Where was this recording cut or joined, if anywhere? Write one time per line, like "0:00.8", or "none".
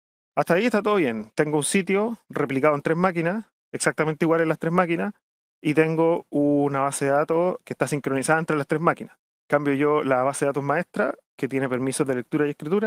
0:07.6